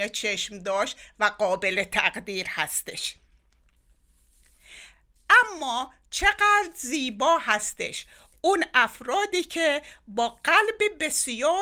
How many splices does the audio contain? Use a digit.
0